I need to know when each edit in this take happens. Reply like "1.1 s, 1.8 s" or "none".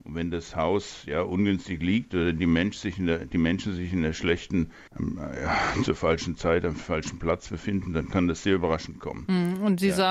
4.9 s